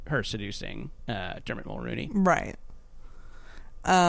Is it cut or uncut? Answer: uncut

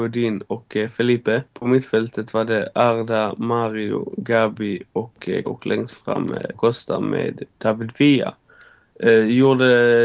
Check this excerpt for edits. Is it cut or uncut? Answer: cut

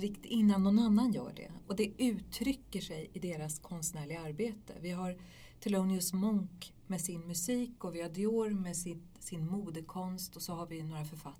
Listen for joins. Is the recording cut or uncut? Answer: uncut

